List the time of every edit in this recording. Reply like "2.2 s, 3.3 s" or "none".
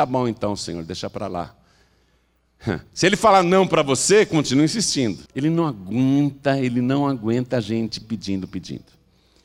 2.9 s, 5.3 s, 8.0 s